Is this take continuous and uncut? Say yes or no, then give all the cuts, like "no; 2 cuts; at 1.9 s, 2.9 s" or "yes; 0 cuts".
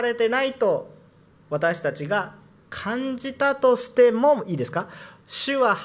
no; 1 cut; at 1.3 s